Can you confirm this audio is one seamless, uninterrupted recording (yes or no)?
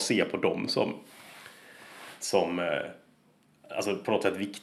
yes